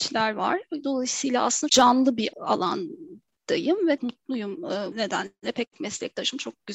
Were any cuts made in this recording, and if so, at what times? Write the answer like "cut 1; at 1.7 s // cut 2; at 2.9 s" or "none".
cut 1; at 1.7 s // cut 2; at 2.3 s // cut 3; at 4.0 s // cut 4; at 4.9 s // cut 5; at 5.7 s